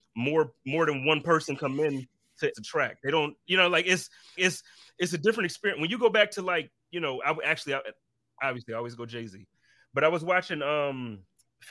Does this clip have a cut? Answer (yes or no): yes